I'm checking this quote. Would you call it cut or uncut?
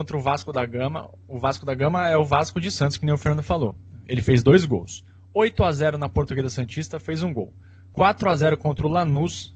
uncut